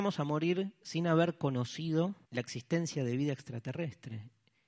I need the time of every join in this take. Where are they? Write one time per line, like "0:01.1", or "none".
0:02.2